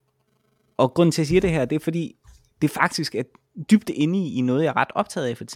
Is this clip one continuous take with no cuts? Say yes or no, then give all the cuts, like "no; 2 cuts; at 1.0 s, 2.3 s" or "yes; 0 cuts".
yes; 0 cuts